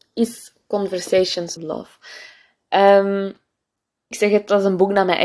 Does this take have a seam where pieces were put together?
yes; 2 cuts; at 1.6 s, 4.1 s

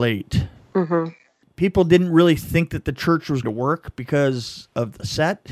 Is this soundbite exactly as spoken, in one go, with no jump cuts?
no; 1 cut; at 3.4 s

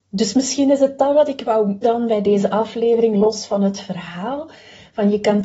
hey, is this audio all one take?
no; 1 cut; at 1.8 s

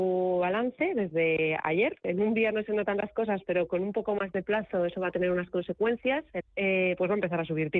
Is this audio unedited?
no; 1 cut; at 6.4 s

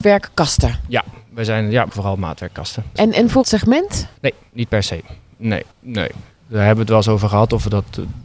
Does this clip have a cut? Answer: yes; 4 cuts; at 1.9 s, 3.4 s, 4.2 s, 5.7 s

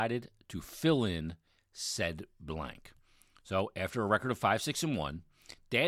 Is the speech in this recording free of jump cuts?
yes; 0 cuts

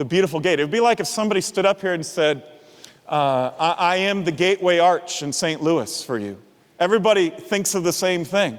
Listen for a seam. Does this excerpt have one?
no; 0 cuts

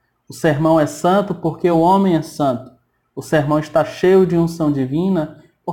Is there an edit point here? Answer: no; 0 cuts

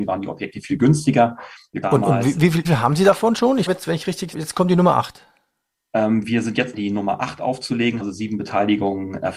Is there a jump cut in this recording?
yes; 6 cuts; at 1.8 s, 2.6 s, 3.7 s, 4.3 s, 6.7 s, 8.0 s

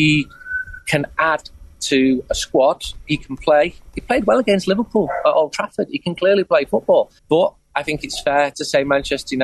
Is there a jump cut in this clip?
yes; 1 cut; at 7.2 s

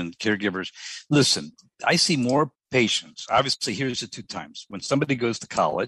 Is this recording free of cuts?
yes; 0 cuts

